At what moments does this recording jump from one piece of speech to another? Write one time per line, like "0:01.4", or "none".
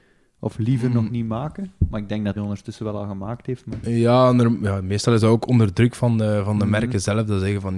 0:02.4